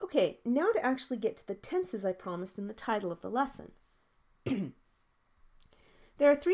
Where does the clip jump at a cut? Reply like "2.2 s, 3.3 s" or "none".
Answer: none